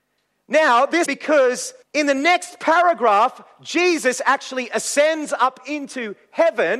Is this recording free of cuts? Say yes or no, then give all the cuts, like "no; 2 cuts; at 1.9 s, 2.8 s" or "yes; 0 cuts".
no; 2 cuts; at 1.1 s, 1.8 s